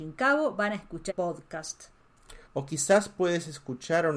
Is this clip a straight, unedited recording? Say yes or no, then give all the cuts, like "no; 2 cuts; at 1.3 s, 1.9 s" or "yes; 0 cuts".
no; 2 cuts; at 1.1 s, 2.4 s